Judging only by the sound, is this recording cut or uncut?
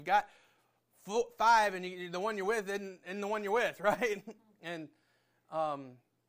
uncut